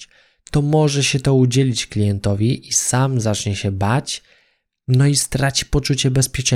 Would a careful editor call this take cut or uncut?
uncut